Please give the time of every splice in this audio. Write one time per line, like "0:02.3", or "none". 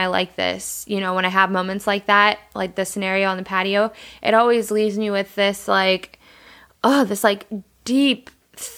none